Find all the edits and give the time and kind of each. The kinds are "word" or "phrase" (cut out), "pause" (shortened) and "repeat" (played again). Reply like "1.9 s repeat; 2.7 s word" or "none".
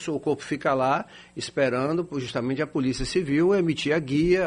none